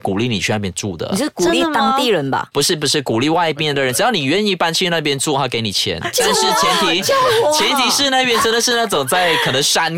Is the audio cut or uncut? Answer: uncut